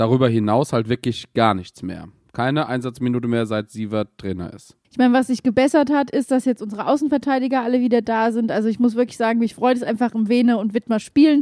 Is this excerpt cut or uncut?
cut